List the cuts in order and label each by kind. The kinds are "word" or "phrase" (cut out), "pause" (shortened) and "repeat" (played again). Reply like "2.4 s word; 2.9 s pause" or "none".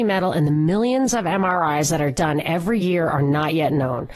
none